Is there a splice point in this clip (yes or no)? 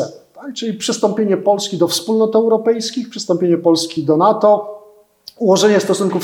no